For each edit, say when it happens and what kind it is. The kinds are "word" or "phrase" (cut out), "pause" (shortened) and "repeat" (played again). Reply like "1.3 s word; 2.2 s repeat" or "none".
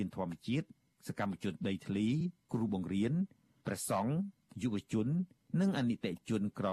none